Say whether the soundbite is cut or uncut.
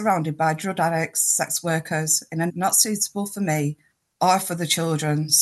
cut